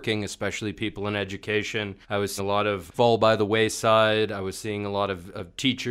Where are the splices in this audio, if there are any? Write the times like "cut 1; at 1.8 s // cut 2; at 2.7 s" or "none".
cut 1; at 2.0 s // cut 2; at 2.4 s // cut 3; at 2.9 s